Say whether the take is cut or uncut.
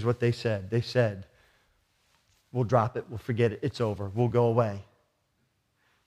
uncut